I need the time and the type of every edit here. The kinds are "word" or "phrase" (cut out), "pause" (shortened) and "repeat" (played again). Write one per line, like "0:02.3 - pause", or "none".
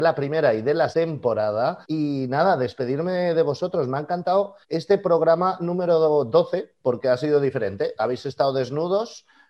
0:00.9 - word
0:01.8 - pause
0:04.6 - pause